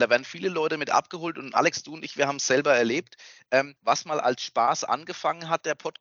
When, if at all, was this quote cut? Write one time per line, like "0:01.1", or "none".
0:03.8